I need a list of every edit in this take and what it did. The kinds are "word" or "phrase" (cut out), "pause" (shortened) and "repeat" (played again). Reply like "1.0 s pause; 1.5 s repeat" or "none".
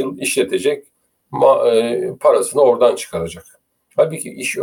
none